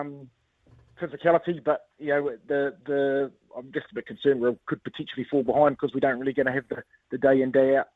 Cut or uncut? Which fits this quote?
uncut